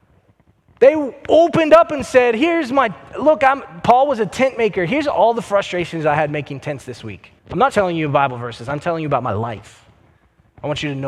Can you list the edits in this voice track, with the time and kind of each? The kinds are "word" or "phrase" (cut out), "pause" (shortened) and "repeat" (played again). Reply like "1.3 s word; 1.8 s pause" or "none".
7.4 s pause; 7.7 s word